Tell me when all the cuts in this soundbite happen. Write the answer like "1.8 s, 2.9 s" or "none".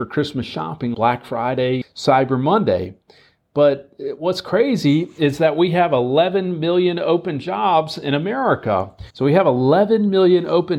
0.9 s, 1.8 s, 9.1 s